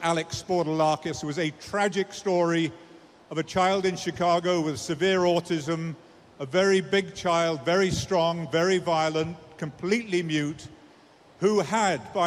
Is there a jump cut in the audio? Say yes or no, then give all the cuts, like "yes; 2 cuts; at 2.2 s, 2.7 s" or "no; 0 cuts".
no; 0 cuts